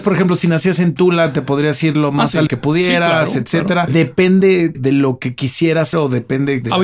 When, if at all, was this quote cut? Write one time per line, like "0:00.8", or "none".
0:02.5
0:04.7
0:05.9